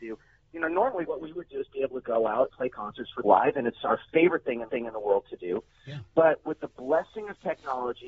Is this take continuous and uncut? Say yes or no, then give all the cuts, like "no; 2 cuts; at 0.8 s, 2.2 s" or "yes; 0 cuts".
no; 3 cuts; at 2.5 s, 3.2 s, 4.7 s